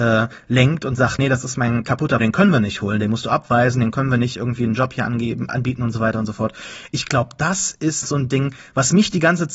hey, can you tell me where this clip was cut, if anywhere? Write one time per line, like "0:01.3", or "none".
0:01.2
0:02.2
0:05.5
0:08.0